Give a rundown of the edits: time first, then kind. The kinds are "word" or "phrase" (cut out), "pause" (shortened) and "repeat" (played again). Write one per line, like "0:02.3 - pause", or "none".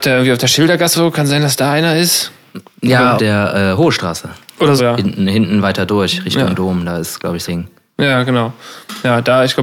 0:00.9 - word
0:03.2 - word
0:04.8 - word
0:07.5 - word